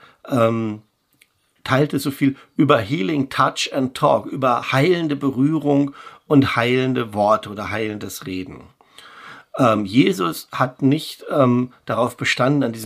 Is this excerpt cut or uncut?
uncut